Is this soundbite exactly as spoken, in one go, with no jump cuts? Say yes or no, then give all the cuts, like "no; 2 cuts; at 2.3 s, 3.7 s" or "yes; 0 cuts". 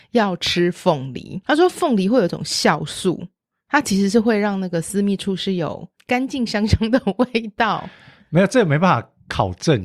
no; 1 cut; at 5.9 s